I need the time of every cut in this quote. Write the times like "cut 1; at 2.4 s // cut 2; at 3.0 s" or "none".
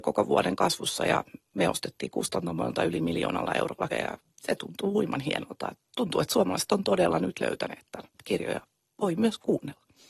cut 1; at 3.9 s // cut 2; at 4.3 s // cut 3; at 8.1 s